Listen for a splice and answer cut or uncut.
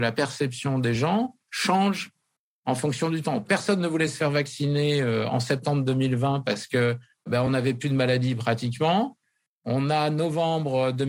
uncut